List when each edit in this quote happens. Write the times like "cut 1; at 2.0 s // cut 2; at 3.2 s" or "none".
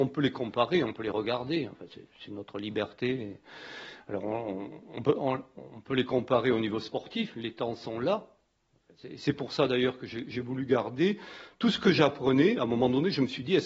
none